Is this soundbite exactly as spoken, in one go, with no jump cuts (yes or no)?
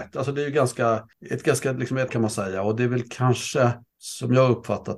no